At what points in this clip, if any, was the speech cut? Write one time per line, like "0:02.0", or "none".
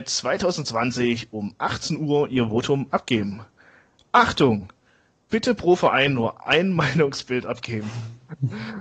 none